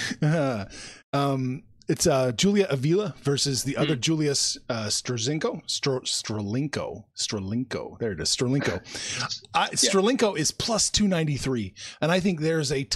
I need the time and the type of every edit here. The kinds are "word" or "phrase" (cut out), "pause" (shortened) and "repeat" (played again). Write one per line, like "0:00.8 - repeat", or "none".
none

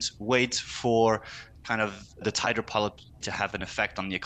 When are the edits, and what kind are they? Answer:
0:02.2 - word
0:03.2 - word

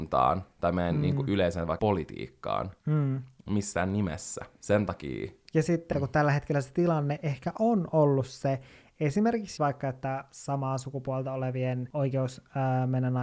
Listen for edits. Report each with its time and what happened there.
0:01.8 - word
0:02.8 - pause
0:05.9 - phrase
0:09.6 - word

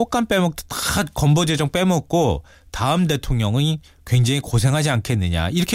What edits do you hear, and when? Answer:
none

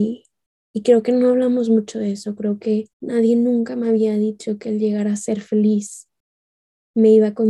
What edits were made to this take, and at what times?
0:02.9 - pause

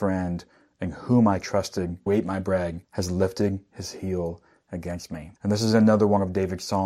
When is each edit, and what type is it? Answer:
0:02.1 - word
0:02.8 - pause
0:05.4 - pause

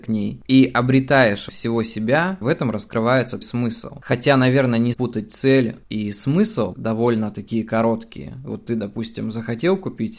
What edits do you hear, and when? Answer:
0:01.5 - word
0:02.4 - word
0:03.4 - word
0:04.9 - word
0:06.7 - phrase

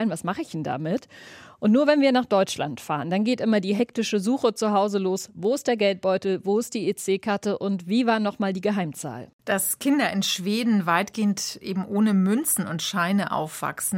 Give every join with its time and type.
0:09.3 - pause

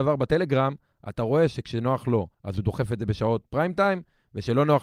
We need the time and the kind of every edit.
0:02.3 - pause

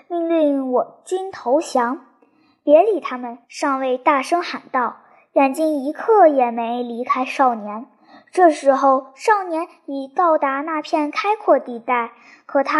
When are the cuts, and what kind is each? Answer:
0:03.4 - pause

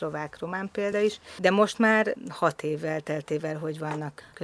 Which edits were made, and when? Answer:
none

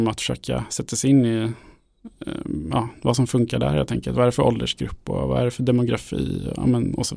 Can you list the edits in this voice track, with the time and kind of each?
none

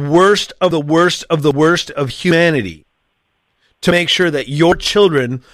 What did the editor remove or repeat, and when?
none

